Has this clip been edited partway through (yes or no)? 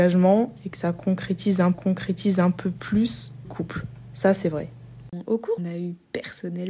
yes